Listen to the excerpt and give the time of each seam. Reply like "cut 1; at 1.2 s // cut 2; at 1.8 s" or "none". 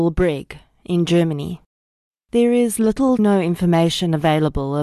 cut 1; at 2.1 s // cut 2; at 3.2 s